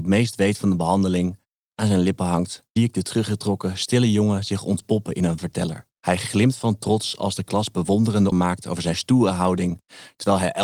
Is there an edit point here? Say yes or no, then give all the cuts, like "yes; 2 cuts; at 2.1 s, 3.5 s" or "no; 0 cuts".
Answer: yes; 5 cuts; at 1.8 s, 2.8 s, 5.4 s, 5.9 s, 8.3 s